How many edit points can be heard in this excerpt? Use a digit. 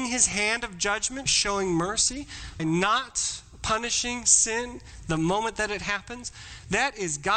2